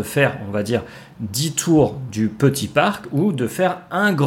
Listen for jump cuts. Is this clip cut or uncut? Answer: uncut